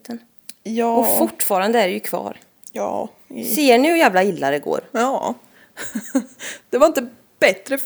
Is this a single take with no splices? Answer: yes; 0 cuts

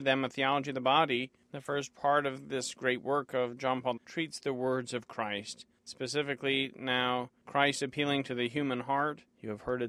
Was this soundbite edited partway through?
yes; 1 cut; at 4.0 s

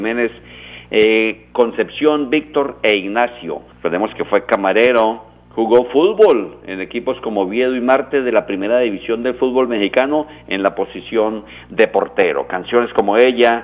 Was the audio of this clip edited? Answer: yes; 1 cut; at 3.7 s

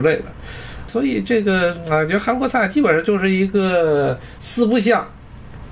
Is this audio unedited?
yes; 0 cuts

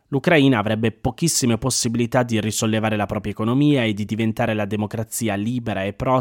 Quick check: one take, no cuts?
yes; 0 cuts

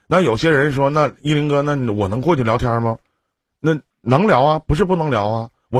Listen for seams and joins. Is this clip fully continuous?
no; 1 cut; at 3.9 s

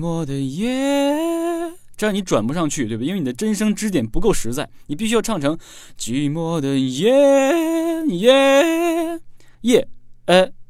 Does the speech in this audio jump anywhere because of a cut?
yes; 1 cut; at 9.5 s

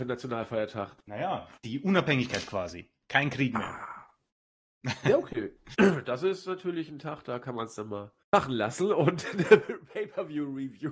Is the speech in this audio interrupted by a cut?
yes; 2 cuts; at 1.6 s, 8.2 s

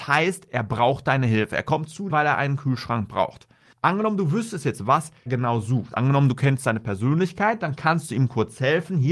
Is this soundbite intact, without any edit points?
no; 2 cuts; at 2.1 s, 5.3 s

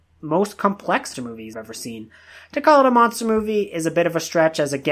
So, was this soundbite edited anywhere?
yes; 2 cuts; at 1.1 s, 1.5 s

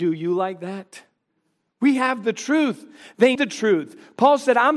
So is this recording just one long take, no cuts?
no; 2 cuts; at 1.3 s, 3.3 s

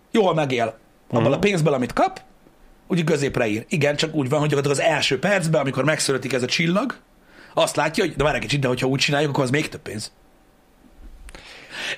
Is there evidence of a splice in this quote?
no; 0 cuts

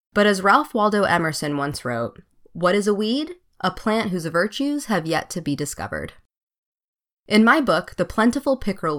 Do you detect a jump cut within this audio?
no; 0 cuts

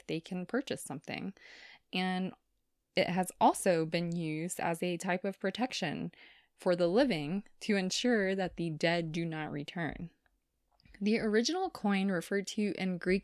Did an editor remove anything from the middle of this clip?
no; 0 cuts

